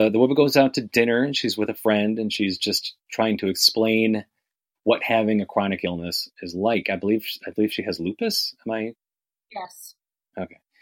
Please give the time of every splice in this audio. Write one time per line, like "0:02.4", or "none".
none